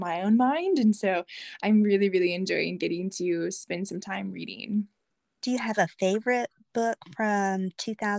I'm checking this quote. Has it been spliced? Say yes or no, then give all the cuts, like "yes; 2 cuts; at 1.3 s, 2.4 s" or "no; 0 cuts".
no; 0 cuts